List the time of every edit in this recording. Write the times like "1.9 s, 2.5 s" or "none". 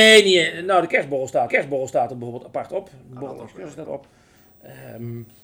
1.5 s, 3.8 s

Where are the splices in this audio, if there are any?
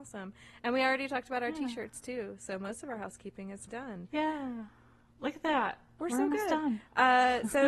3.7 s

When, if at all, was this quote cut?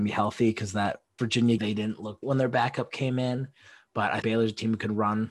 1.2 s, 1.6 s, 2.2 s, 4.2 s

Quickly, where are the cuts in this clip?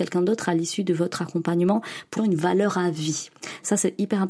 2.2 s

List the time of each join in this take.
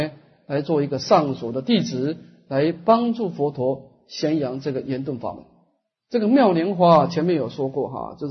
none

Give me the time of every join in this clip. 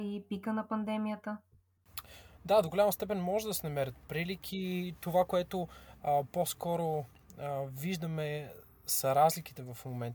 none

